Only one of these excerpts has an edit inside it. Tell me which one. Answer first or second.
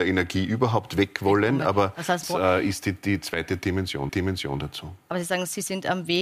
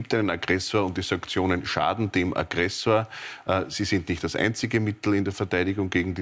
first